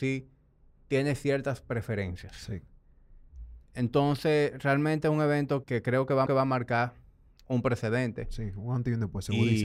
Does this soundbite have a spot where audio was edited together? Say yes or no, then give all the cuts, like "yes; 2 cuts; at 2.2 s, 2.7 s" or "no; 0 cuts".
yes; 2 cuts; at 5.6 s, 6.3 s